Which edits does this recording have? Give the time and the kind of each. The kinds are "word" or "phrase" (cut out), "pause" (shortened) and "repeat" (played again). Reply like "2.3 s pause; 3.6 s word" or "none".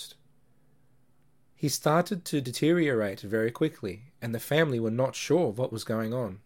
none